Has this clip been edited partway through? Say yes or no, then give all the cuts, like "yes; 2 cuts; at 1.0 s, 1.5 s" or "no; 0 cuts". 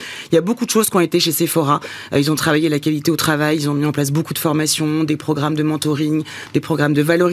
no; 0 cuts